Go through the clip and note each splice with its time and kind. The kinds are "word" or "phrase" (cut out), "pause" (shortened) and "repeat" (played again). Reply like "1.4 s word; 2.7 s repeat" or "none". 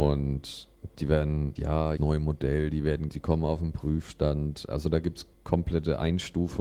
1.6 s word; 2.0 s word; 3.1 s word; 5.3 s pause